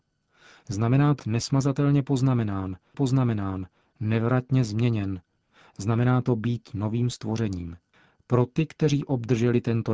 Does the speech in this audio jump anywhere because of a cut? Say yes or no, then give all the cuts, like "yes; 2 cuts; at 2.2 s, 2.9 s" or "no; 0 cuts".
yes; 2 cuts; at 1.2 s, 2.9 s